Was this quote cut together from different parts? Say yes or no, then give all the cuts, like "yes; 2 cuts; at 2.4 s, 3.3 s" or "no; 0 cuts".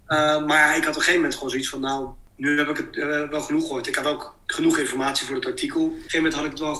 yes; 1 cut; at 4.4 s